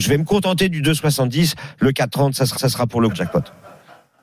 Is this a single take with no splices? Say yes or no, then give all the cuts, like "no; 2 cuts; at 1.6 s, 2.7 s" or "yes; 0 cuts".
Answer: no; 2 cuts; at 2.6 s, 3.1 s